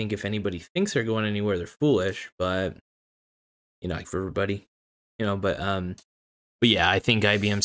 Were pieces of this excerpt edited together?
yes; 1 cut; at 4.0 s

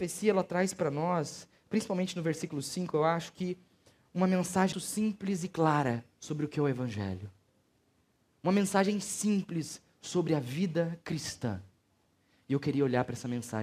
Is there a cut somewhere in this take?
yes; 2 cuts; at 4.7 s, 6.1 s

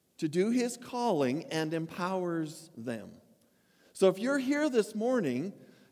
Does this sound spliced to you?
no; 0 cuts

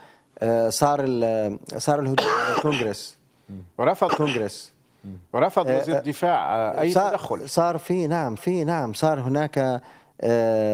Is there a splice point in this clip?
yes; 2 cuts; at 4.1 s, 8.4 s

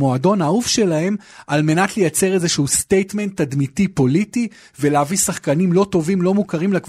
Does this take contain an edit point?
no; 0 cuts

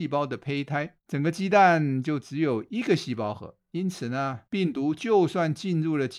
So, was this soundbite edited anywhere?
yes; 2 cuts; at 1.0 s, 4.5 s

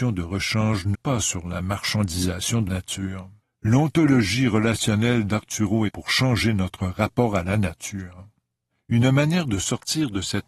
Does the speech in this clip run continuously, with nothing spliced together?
no; 5 cuts; at 0.9 s, 2.7 s, 3.4 s, 5.9 s, 8.7 s

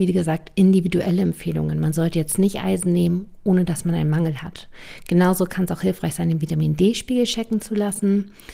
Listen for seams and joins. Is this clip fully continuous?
yes; 0 cuts

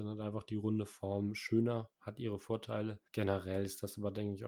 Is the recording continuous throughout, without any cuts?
no; 1 cut; at 3.1 s

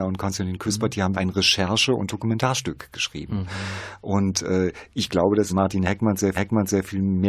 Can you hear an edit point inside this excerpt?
yes; 3 cuts; at 1.1 s, 5.5 s, 6.4 s

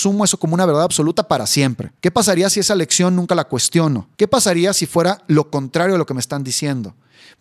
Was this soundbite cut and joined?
yes; 2 cuts; at 2.0 s, 4.1 s

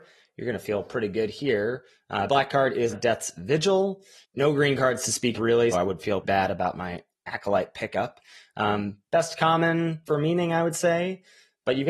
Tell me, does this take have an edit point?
yes; 6 cuts; at 2.3 s, 2.9 s, 5.3 s, 5.7 s, 6.2 s, 10.1 s

